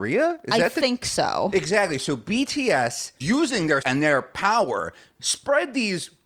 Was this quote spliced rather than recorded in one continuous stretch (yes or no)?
yes